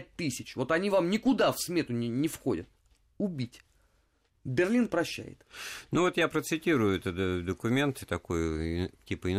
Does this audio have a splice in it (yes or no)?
no